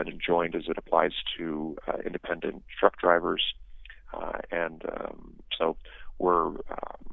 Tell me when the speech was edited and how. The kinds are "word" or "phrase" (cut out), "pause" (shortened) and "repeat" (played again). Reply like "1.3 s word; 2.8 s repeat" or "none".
none